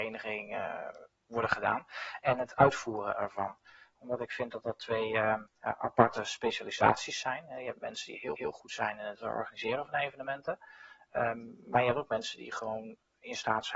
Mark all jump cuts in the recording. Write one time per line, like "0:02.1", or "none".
0:05.5
0:08.4

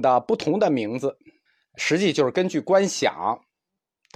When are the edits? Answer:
0:01.5

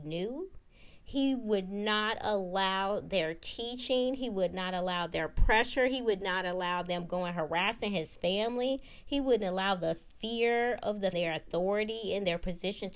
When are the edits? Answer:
0:11.1

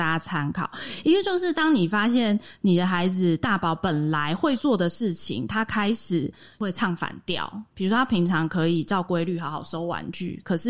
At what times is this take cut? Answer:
none

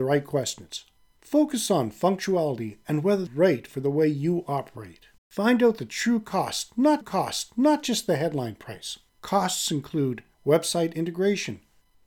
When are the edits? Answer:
0:01.0
0:03.3
0:05.2
0:07.0
0:09.1
0:10.3

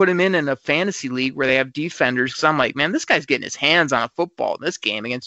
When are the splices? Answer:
none

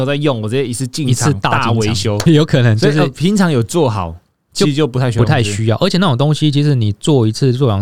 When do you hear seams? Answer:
0:02.3

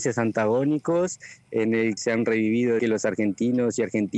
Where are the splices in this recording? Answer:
0:02.0
0:02.8

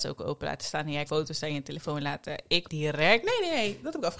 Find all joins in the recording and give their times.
0:01.1
0:02.7

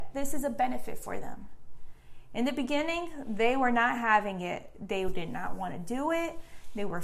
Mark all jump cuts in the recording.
none

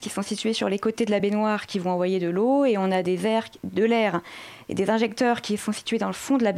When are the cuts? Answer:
none

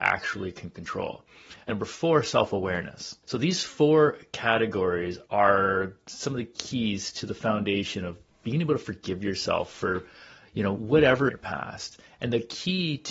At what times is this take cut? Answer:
0:01.7
0:03.2
0:05.3
0:11.3

